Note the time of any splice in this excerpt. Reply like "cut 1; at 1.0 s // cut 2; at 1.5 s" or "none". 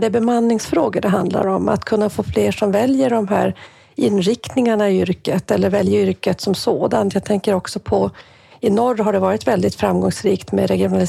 none